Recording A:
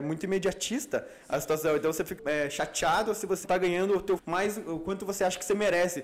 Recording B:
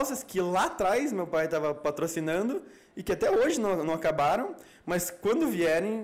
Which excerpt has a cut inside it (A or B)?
A